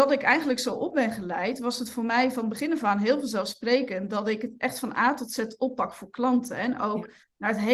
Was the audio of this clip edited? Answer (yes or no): no